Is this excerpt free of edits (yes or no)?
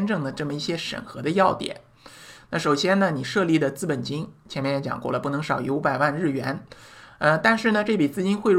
yes